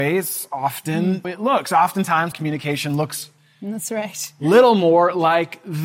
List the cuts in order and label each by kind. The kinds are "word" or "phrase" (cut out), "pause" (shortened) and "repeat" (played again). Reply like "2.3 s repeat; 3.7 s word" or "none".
1.2 s word; 2.3 s word

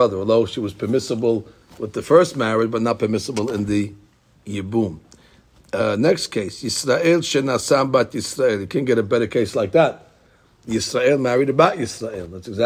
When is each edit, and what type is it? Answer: none

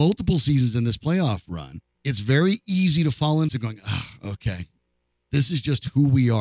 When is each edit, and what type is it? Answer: 1.9 s pause; 3.5 s phrase

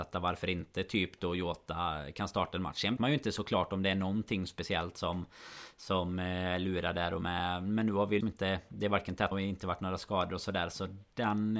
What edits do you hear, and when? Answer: 3.0 s word; 8.2 s word; 9.3 s word

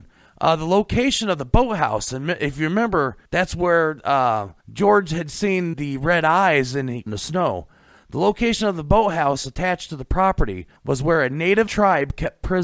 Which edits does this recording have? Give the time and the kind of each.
3.2 s pause; 4.6 s pause; 5.7 s word; 7.1 s phrase; 10.8 s pause; 11.7 s word

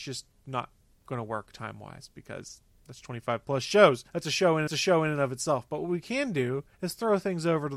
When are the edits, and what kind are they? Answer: 4.1 s pause; 4.7 s repeat; 6.7 s pause

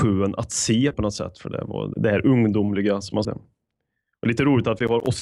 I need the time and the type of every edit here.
0.9 s word; 1.9 s word; 3.2 s word

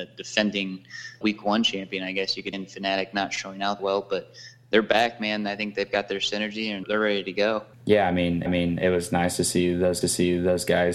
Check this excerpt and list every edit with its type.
1.2 s word; 2.5 s word; 3.8 s word; 6.8 s word; 7.7 s pause; 8.5 s repeat; 10.0 s repeat

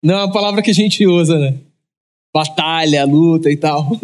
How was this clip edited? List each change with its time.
none

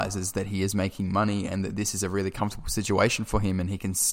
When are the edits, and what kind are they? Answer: none

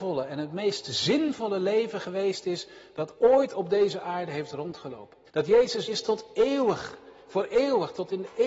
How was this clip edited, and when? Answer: 5.3 s pause; 5.9 s phrase

